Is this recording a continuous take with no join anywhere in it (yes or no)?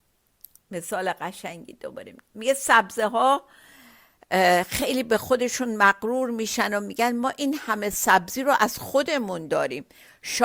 yes